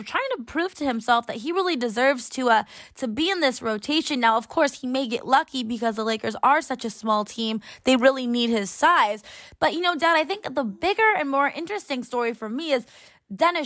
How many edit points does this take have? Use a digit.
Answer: 0